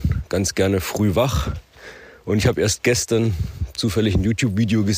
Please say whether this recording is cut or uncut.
uncut